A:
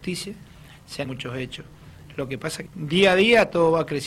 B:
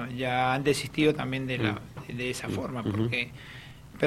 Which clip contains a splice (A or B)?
A